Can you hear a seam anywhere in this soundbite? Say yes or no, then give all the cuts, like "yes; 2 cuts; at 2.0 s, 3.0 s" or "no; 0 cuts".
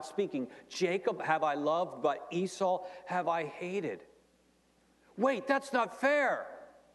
no; 0 cuts